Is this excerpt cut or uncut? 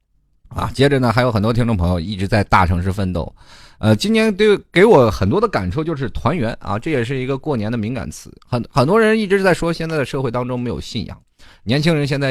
uncut